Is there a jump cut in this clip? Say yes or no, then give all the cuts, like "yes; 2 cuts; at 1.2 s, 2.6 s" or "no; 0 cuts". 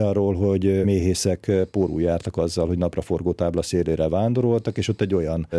no; 0 cuts